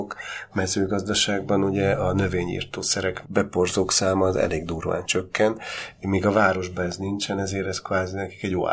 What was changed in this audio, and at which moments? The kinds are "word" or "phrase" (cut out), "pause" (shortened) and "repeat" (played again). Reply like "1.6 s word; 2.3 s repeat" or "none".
3.2 s word